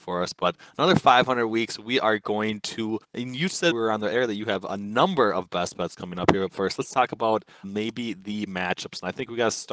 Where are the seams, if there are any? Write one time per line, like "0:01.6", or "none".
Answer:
0:03.0
0:03.7
0:07.6
0:08.5